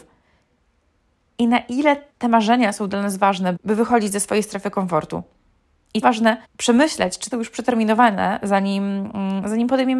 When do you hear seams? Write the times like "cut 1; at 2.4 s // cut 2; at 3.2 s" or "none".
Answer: cut 1; at 2.1 s // cut 2; at 3.6 s // cut 3; at 6.0 s // cut 4; at 6.4 s // cut 5; at 7.3 s

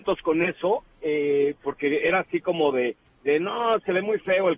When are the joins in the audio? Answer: none

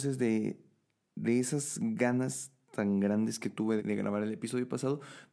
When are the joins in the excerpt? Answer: cut 1; at 3.8 s

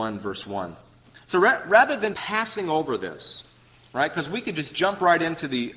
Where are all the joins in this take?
cut 1; at 2.1 s

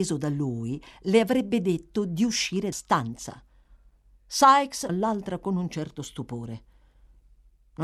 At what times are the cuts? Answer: cut 1; at 2.7 s // cut 2; at 4.9 s

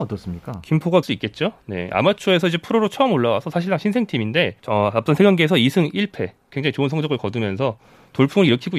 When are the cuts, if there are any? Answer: cut 1; at 1.0 s // cut 2; at 4.6 s

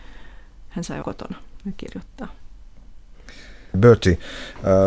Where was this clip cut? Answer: cut 1; at 1.0 s

